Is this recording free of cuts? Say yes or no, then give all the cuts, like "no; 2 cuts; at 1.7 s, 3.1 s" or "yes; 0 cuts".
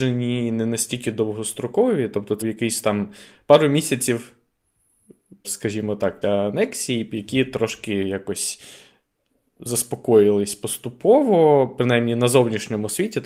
no; 3 cuts; at 2.4 s, 5.4 s, 6.2 s